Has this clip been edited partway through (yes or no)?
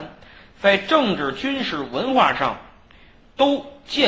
no